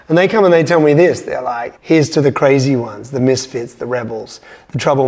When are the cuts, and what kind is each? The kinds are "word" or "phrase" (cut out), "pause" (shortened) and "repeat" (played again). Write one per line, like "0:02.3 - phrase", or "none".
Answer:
0:01.8 - pause